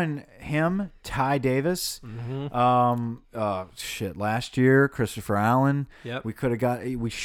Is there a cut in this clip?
no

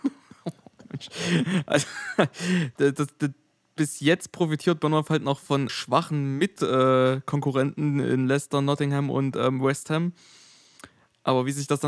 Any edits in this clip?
yes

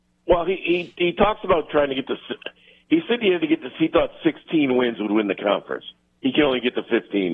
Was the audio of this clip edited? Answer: no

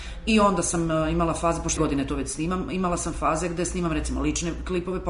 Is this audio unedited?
no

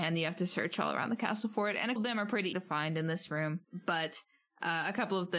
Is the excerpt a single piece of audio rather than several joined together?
no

